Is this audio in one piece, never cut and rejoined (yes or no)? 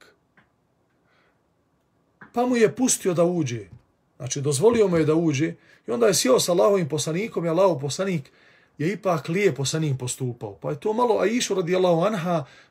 yes